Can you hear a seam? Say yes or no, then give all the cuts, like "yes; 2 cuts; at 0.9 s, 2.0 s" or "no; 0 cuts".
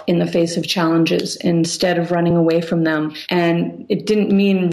no; 0 cuts